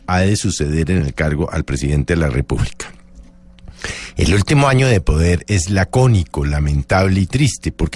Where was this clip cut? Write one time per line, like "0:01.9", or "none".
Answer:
none